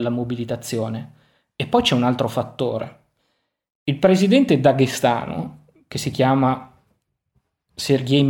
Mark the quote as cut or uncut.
uncut